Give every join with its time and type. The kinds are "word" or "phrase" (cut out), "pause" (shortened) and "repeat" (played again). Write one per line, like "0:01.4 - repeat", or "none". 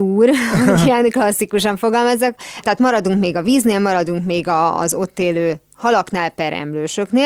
none